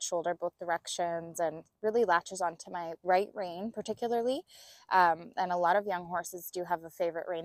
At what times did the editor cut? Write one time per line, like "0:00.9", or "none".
none